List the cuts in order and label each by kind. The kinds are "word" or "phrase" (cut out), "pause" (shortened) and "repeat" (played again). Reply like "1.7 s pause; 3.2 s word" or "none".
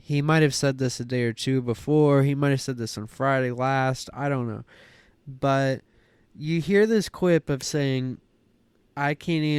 7.6 s word